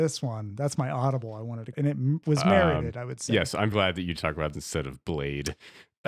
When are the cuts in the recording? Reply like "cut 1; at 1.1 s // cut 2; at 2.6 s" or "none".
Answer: cut 1; at 1.7 s // cut 2; at 3.7 s // cut 3; at 4.1 s // cut 4; at 4.5 s